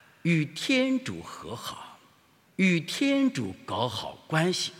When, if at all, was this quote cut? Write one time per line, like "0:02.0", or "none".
0:02.4